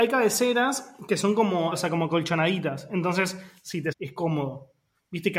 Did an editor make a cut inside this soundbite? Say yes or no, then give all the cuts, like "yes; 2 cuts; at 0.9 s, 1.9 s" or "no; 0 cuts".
yes; 2 cuts; at 1.7 s, 3.9 s